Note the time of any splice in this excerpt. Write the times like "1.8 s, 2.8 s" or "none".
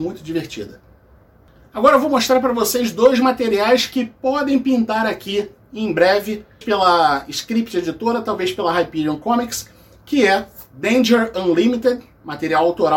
6.6 s

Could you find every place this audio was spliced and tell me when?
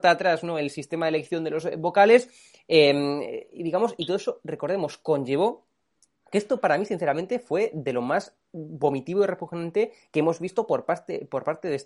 none

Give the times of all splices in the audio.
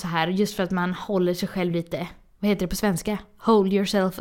none

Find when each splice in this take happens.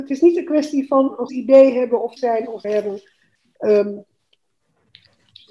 1.3 s, 2.2 s, 2.6 s

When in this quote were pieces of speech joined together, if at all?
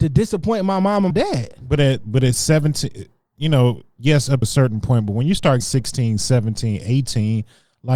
1.1 s, 4.4 s, 5.6 s

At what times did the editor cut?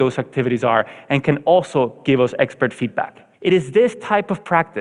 3.3 s

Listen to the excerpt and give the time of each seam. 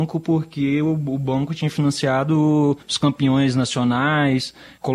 2.8 s

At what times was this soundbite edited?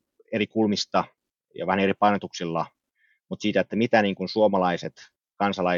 none

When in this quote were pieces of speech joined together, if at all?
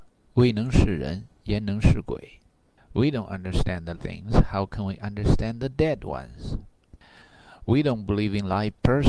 3.9 s

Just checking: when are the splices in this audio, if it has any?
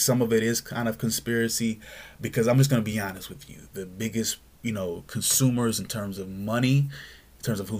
none

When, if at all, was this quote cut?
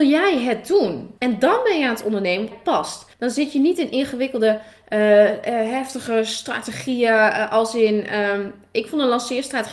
1.2 s, 2.5 s, 3.1 s

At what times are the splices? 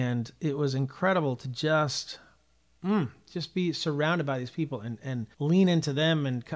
5.3 s

